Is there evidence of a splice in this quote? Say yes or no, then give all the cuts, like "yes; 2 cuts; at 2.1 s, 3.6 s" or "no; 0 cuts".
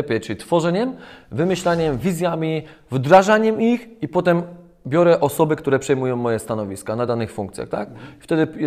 no; 0 cuts